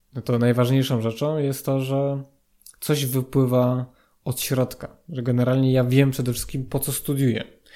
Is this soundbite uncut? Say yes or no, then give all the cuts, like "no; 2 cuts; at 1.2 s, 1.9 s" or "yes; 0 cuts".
yes; 0 cuts